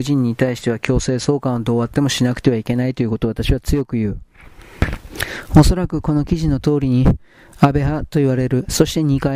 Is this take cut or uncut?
uncut